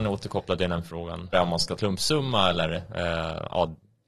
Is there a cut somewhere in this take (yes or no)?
yes